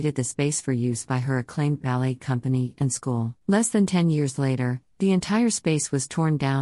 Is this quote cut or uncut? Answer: cut